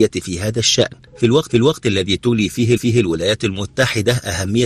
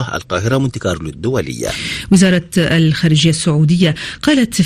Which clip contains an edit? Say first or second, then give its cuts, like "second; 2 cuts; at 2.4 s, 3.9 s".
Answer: first; 2 cuts; at 1.5 s, 2.8 s